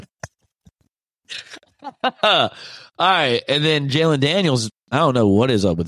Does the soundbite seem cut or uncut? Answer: uncut